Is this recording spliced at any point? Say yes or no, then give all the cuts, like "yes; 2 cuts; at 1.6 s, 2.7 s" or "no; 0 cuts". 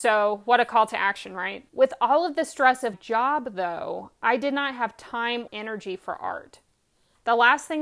yes; 3 cuts; at 1.7 s, 2.9 s, 5.5 s